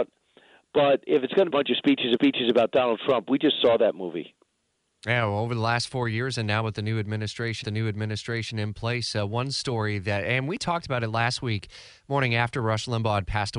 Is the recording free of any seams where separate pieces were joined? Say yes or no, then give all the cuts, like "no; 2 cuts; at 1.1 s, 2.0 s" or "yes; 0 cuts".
no; 4 cuts; at 1.1 s, 1.5 s, 2.2 s, 7.6 s